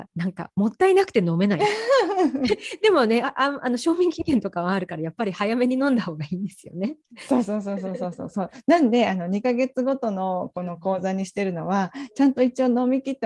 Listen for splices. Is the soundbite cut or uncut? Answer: uncut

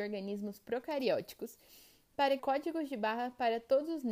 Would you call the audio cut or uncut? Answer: cut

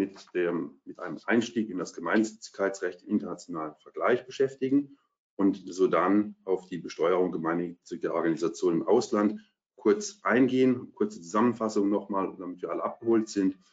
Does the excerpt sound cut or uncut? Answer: uncut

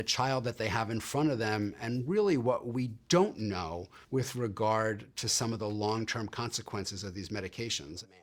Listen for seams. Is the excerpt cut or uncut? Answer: cut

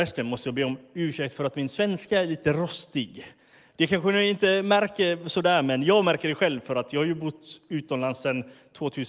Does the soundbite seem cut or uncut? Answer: uncut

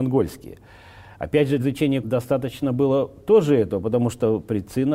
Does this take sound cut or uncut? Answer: cut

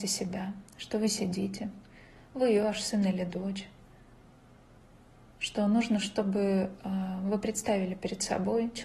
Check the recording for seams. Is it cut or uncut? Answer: uncut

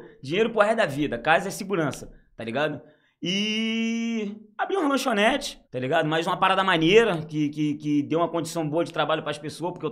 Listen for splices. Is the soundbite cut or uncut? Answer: cut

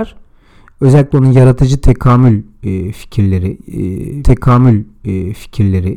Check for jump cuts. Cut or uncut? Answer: cut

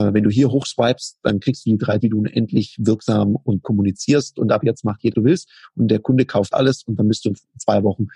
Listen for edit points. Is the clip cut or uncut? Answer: cut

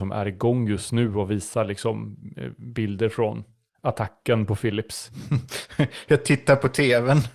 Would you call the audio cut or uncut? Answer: uncut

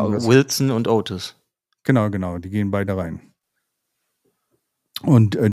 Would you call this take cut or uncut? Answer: cut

